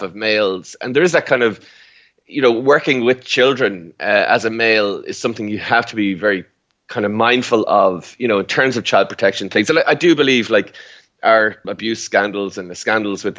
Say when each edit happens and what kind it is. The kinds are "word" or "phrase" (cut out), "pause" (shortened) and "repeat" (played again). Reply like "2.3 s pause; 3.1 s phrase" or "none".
11.6 s word